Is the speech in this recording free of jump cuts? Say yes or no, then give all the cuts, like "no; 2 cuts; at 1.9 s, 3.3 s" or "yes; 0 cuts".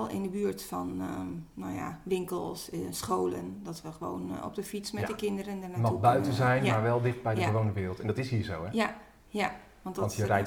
yes; 0 cuts